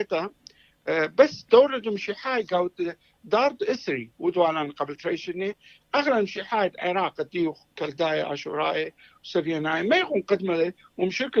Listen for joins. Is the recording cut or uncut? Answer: uncut